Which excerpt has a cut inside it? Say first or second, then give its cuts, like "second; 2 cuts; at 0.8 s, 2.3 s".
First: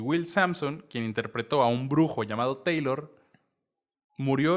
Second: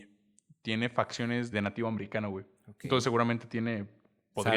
second; 1 cut; at 1.5 s